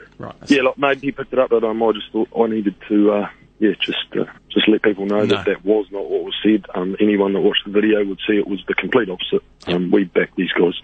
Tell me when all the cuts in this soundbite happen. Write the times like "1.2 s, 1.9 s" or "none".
1.0 s, 1.5 s, 4.4 s